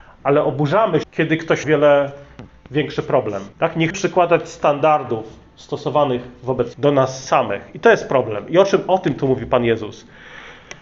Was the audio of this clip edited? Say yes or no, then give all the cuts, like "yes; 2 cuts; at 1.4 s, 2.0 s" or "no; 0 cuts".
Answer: yes; 5 cuts; at 1.0 s, 1.6 s, 3.5 s, 3.9 s, 6.7 s